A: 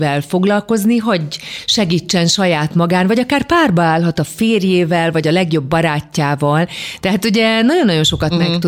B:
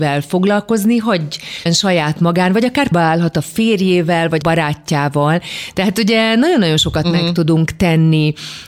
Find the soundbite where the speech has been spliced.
B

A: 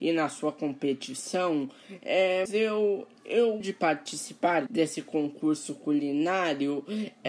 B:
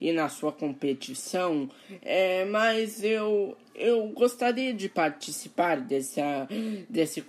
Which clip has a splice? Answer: A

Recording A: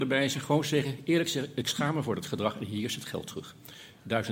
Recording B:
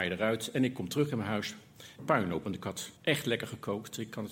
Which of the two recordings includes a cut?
B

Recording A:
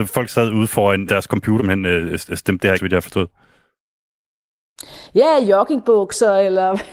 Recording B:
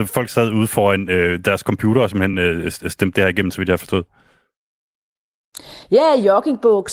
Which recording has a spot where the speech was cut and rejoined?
A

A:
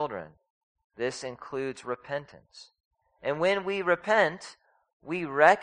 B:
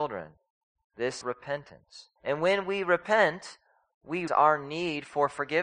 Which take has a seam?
B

